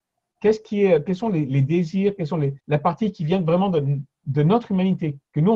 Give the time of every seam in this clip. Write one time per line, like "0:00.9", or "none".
0:02.6